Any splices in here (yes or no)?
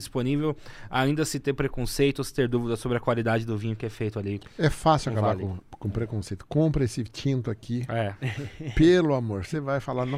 no